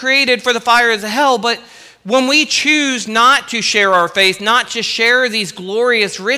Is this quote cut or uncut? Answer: uncut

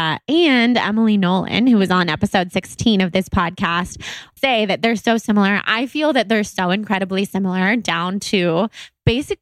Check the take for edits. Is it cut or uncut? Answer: cut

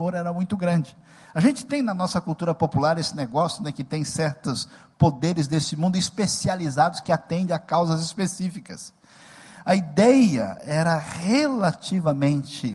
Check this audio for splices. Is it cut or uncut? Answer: uncut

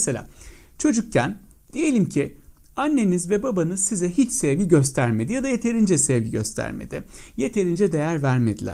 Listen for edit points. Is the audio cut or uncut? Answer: uncut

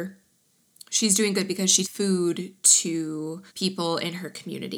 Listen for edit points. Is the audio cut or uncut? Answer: cut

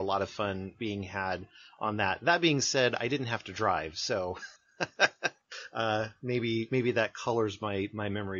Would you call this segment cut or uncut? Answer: uncut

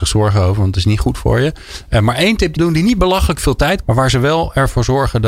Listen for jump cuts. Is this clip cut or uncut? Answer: cut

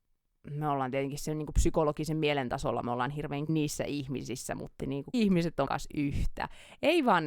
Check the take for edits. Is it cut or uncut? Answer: cut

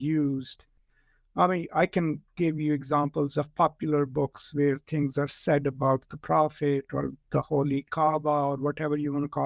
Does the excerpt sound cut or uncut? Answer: uncut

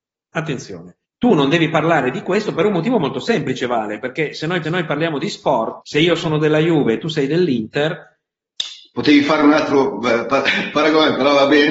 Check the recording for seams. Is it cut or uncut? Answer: cut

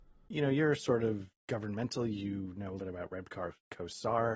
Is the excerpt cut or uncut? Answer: cut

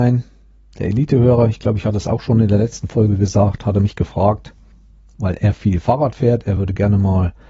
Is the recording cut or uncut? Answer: uncut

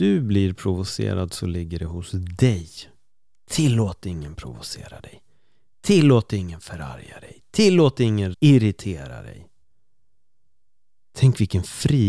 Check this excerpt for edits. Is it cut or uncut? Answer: cut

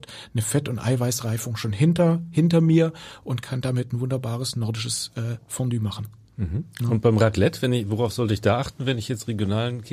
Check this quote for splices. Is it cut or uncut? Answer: uncut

